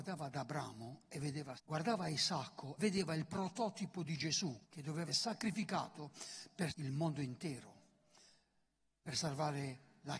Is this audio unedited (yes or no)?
no